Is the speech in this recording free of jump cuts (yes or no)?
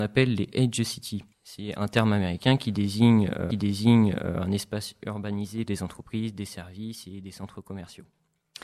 no